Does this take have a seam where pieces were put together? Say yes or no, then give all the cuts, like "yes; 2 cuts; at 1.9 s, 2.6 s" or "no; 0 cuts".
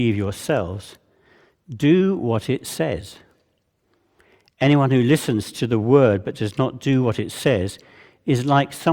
no; 0 cuts